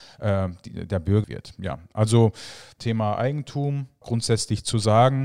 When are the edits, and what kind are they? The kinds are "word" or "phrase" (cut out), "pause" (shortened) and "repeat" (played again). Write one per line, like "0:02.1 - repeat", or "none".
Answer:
0:01.2 - phrase
0:02.8 - phrase
0:04.0 - phrase

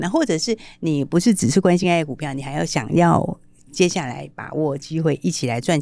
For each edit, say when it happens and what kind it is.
none

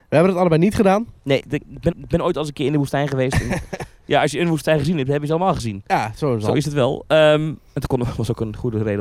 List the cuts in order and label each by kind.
0:01.4 - word
0:01.9 - repeat
0:07.7 - pause

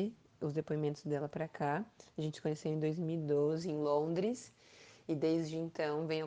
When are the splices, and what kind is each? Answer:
none

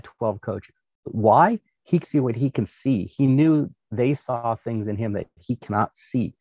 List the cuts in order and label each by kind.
0:02.0 - word

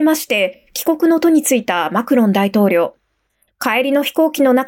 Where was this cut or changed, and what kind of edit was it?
none

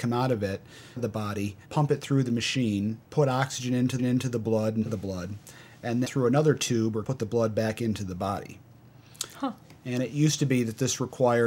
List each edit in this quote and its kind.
0:01.0 - phrase
0:01.6 - pause
0:03.0 - pause
0:04.0 - repeat
0:04.9 - phrase
0:06.0 - word
0:07.0 - word

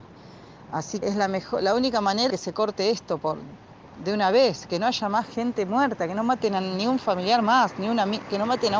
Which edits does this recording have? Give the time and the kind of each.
0:01.0 - word
0:02.3 - word

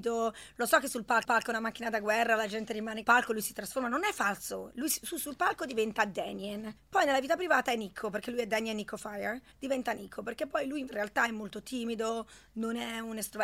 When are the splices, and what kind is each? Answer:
0:01.2 - repeat
0:03.0 - phrase
0:06.8 - pause
0:09.5 - pause

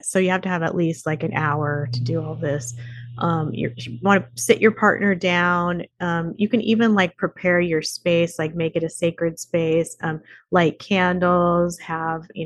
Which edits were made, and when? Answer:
none

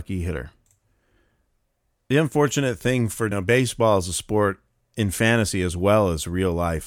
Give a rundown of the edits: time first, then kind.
0:03.3 - phrase

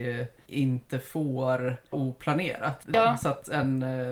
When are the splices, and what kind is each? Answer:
0:01.9 - word

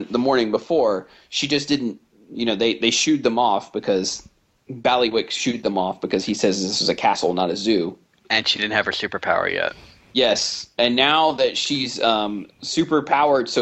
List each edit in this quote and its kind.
none

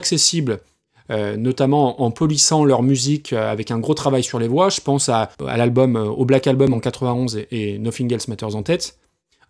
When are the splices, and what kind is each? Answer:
0:05.3 - pause

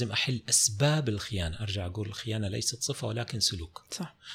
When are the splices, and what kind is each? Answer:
none

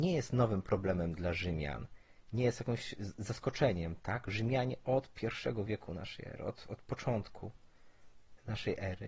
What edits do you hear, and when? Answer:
none

